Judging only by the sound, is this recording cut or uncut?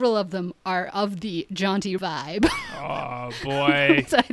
cut